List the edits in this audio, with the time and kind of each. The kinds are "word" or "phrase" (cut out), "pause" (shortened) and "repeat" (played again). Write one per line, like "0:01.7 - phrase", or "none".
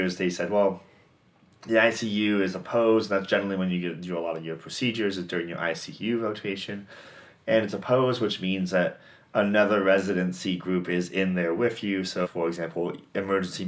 0:12.2 - word